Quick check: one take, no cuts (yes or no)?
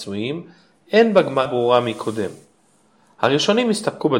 no